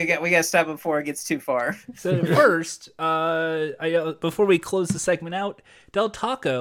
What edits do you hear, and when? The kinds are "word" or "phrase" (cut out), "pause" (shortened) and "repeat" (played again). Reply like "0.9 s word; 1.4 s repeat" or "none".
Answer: none

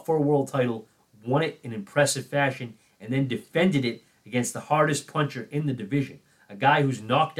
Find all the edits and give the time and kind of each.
none

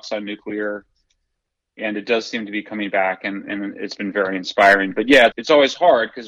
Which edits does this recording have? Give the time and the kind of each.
5.3 s word

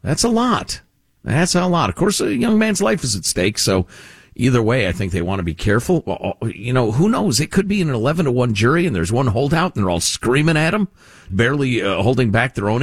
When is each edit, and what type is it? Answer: 11.3 s word

